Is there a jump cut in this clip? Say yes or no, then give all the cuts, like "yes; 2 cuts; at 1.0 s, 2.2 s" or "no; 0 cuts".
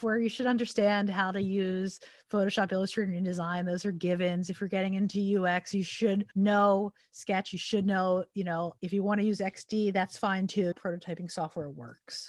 yes; 3 cuts; at 6.3 s, 8.8 s, 10.7 s